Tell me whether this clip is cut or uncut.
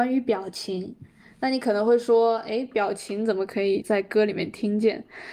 uncut